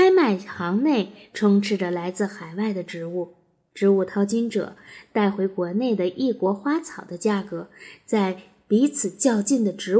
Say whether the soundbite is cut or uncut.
uncut